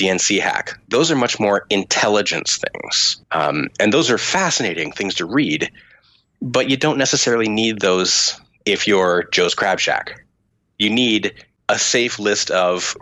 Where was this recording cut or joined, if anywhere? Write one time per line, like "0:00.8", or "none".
0:03.2